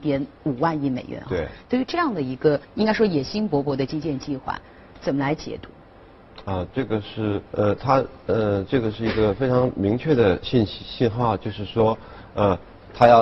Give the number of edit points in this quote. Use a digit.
2